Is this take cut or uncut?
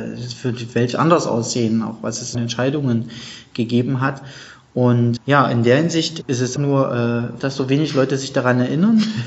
cut